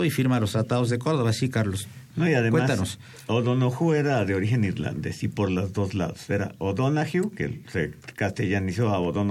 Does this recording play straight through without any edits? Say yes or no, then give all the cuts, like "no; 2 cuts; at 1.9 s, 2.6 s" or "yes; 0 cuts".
yes; 0 cuts